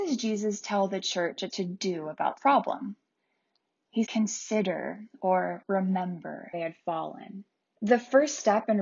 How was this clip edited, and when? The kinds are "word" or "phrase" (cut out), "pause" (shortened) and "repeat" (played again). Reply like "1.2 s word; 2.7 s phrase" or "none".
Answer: 1.5 s word; 2.4 s word; 4.0 s word; 6.5 s phrase; 7.6 s pause